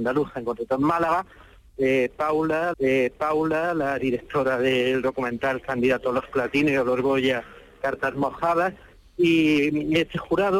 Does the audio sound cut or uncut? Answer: cut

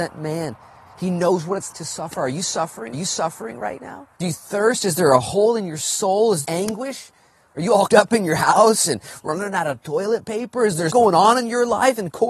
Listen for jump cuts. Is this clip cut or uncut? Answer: cut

